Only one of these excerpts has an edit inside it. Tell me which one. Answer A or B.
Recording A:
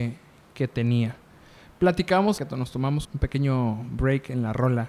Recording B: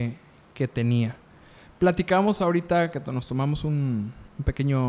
A